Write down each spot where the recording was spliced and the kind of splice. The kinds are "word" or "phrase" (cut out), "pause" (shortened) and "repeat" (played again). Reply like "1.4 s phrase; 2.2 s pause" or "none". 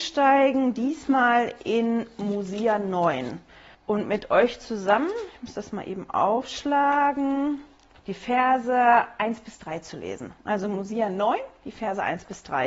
3.7 s pause; 7.9 s pause